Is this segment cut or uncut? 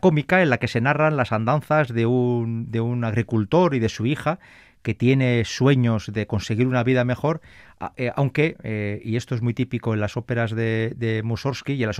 uncut